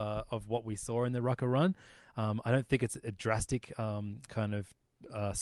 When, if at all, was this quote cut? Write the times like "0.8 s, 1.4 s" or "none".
none